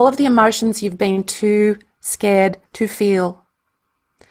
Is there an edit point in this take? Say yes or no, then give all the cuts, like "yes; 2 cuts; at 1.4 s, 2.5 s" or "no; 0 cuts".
yes; 1 cut; at 2.7 s